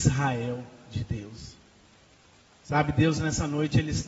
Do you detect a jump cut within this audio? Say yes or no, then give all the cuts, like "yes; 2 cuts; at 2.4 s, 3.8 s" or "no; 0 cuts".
no; 0 cuts